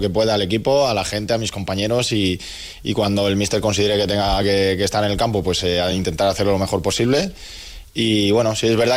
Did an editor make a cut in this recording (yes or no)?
no